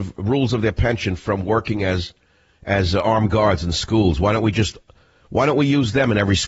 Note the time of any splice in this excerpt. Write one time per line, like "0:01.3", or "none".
none